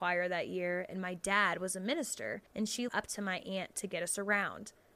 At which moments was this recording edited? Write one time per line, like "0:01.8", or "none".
0:02.5
0:02.9